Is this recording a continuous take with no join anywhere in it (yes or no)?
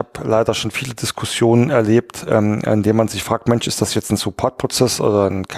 yes